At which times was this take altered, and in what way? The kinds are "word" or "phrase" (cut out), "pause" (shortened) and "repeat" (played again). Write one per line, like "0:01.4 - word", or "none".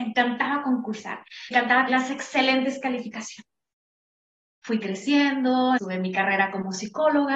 0:01.5 - word
0:01.9 - word
0:05.8 - word